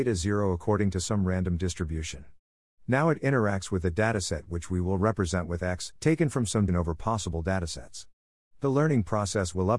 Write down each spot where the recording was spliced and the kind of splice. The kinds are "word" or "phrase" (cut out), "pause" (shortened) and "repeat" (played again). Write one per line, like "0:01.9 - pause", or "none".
0:06.0 - pause
0:06.7 - word

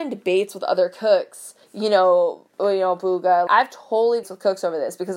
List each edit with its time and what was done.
0:01.6 - pause
0:02.5 - pause
0:03.5 - word
0:04.2 - phrase

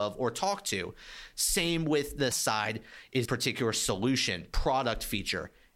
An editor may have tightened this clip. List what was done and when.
0:02.3 - word
0:03.2 - word

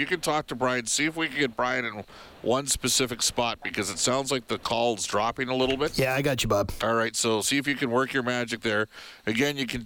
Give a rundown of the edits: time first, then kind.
none

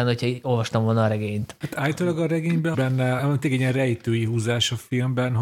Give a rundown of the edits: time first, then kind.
0:02.7 - phrase
0:03.2 - word

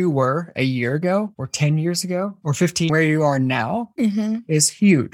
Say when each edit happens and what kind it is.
0:02.9 - phrase

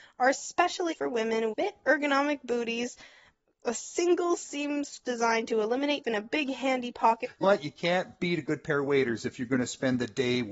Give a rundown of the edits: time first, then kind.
0:00.9 - word
0:01.5 - word
0:05.0 - word
0:06.0 - word
0:07.4 - word

